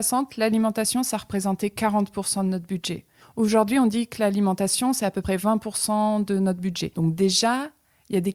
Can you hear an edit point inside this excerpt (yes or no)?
yes